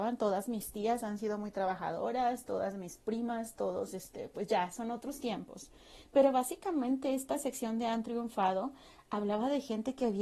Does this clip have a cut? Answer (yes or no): no